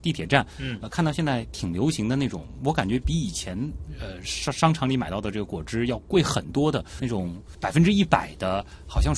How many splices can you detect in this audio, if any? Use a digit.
1